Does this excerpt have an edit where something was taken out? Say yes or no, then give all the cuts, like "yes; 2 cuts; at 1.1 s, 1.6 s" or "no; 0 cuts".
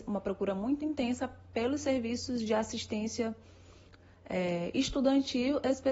no; 0 cuts